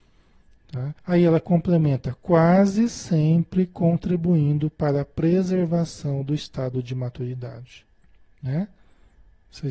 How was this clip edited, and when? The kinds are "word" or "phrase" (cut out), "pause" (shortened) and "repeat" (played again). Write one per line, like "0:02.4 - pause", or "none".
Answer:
0:01.0 - pause
0:08.0 - pause